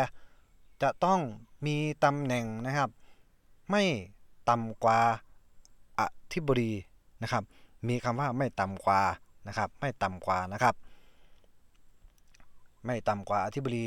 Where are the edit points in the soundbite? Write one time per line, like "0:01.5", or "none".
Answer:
none